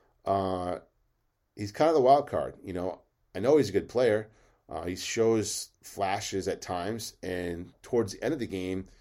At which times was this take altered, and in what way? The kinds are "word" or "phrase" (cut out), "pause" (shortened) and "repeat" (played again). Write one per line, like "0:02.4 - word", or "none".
none